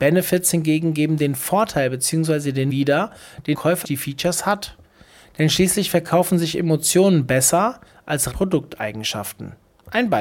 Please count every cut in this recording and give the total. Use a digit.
4